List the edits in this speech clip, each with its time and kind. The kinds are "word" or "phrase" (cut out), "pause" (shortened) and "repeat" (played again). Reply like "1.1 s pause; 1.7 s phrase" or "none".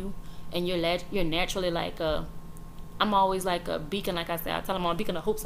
none